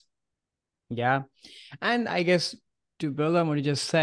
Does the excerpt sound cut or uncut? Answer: uncut